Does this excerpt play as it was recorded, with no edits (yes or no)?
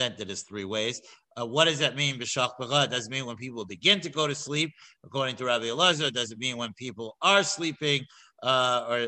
yes